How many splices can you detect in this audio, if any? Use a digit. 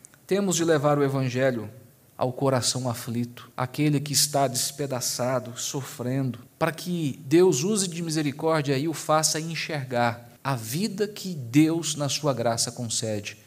4